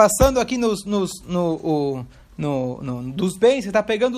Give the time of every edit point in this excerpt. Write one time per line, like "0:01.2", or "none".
none